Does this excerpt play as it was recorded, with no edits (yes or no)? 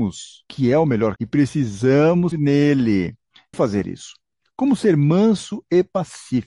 no